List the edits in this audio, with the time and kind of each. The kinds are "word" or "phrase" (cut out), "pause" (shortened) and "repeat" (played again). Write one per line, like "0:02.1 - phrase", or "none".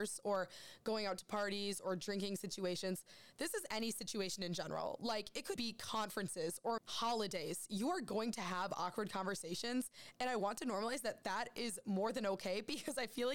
0:05.6 - word
0:06.8 - phrase

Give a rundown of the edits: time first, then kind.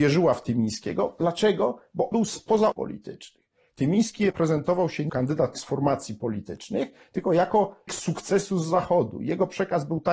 0:02.1 - word
0:02.7 - word
0:04.3 - word
0:05.1 - word
0:05.5 - word
0:07.9 - word

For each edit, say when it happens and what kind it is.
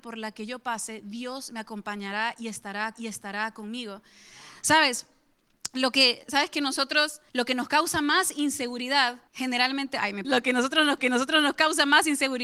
0:02.9 - repeat
0:06.2 - word
0:07.3 - pause
0:09.3 - pause
0:10.2 - phrase
0:11.0 - repeat

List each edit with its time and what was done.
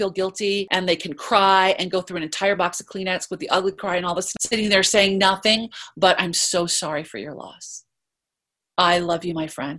none

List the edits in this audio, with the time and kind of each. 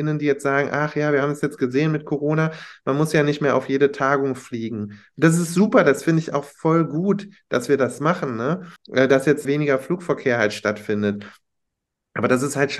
0:08.8 - pause
0:09.4 - word

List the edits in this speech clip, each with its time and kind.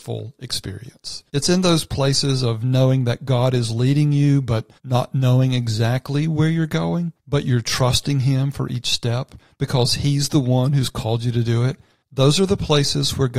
0:01.3 - pause
0:04.8 - pause
0:07.2 - pause
0:12.0 - pause

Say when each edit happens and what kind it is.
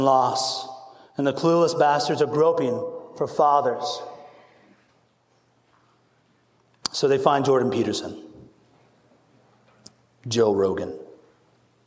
none

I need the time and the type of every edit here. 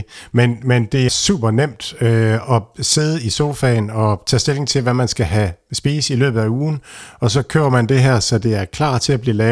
0:01.1 - word

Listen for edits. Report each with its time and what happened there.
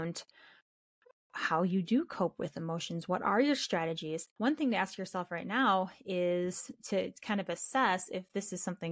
0:04.3 - pause

